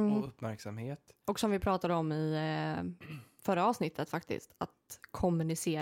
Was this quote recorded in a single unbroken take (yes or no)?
yes